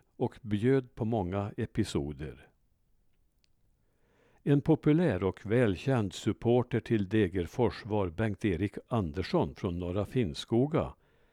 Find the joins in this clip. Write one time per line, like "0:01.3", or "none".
none